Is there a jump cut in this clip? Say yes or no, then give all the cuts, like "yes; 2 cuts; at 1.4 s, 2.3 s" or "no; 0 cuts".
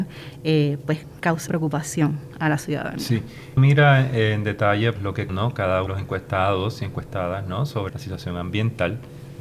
yes; 6 cuts; at 1.5 s, 3.6 s, 5.0 s, 5.3 s, 5.9 s, 7.9 s